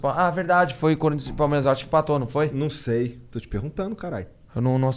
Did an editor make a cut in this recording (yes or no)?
no